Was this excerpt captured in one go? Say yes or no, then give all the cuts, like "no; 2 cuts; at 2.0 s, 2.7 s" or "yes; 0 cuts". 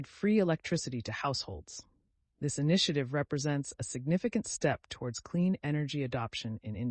yes; 0 cuts